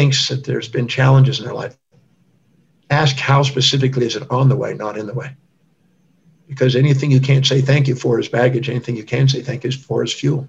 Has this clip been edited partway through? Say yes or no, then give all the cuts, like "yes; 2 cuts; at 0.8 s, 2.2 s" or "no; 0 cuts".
no; 0 cuts